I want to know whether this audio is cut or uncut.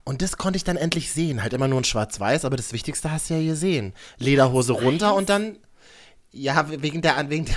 uncut